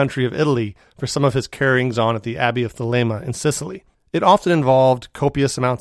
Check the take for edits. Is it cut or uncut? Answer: uncut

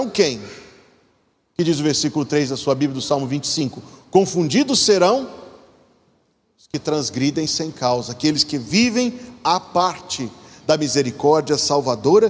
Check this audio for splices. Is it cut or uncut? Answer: uncut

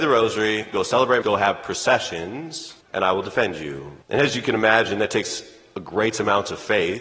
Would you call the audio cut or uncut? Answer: cut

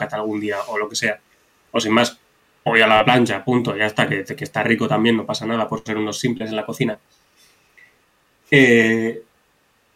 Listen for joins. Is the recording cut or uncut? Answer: uncut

